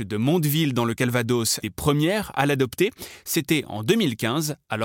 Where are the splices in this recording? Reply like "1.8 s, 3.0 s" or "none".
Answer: 1.6 s

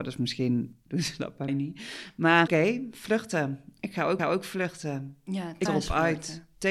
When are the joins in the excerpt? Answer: 1.5 s, 2.5 s, 4.2 s, 5.7 s

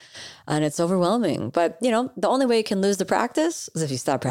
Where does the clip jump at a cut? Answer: none

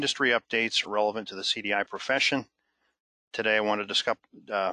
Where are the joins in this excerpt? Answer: none

